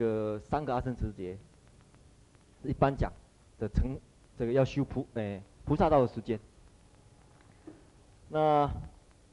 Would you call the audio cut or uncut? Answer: uncut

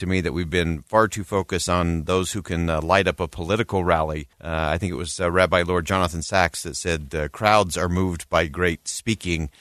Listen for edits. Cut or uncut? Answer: cut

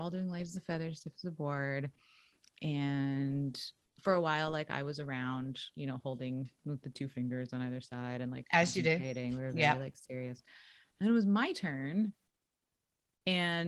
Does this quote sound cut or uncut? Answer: uncut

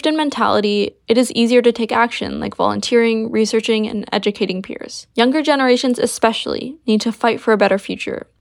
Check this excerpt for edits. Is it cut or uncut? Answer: cut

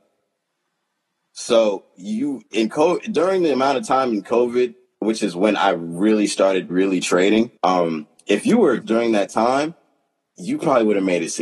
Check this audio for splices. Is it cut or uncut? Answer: cut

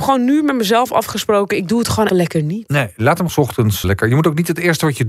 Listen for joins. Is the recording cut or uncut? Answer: cut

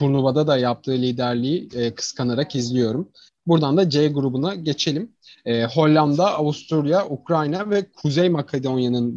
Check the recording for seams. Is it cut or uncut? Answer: uncut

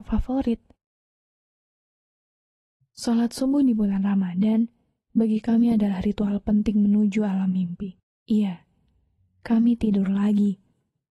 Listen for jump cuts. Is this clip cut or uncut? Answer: cut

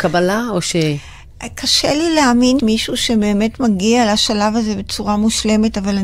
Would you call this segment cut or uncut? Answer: cut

